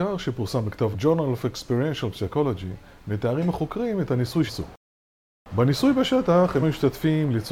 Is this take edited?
yes; 3 cuts; at 0.9 s, 4.5 s, 6.6 s

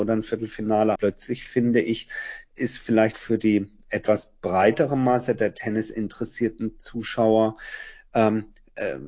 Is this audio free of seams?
no; 2 cuts; at 1.0 s, 3.1 s

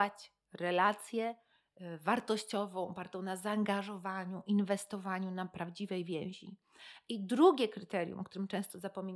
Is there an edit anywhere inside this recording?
no; 0 cuts

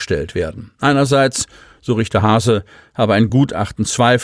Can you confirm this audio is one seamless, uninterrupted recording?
yes; 0 cuts

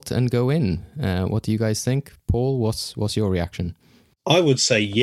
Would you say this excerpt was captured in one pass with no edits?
yes; 0 cuts

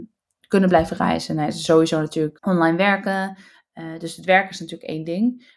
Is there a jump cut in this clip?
yes; 2 cuts; at 1.7 s, 2.4 s

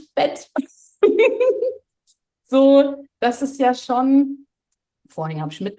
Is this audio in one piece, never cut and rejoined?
yes; 0 cuts

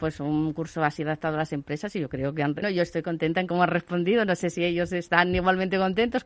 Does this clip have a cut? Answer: yes; 1 cut; at 2.6 s

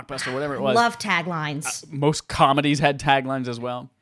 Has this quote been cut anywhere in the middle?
no; 0 cuts

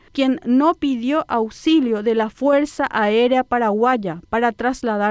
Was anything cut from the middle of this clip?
no; 0 cuts

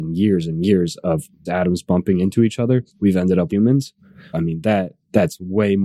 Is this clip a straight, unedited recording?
no; 4 cuts; at 1.5 s, 2.9 s, 3.5 s, 4.3 s

